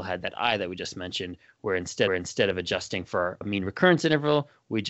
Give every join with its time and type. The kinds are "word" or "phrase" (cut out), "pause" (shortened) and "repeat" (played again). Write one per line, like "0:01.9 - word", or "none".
0:02.1 - repeat
0:03.4 - word